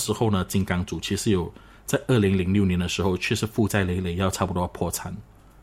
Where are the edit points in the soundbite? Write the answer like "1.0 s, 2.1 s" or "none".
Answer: none